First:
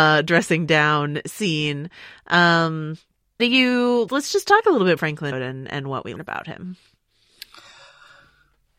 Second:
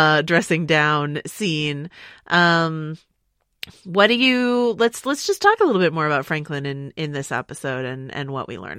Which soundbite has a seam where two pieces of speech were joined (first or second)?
first